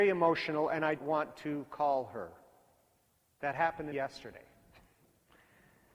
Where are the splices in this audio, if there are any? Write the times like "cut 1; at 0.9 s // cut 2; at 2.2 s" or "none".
cut 1; at 1.0 s // cut 2; at 3.9 s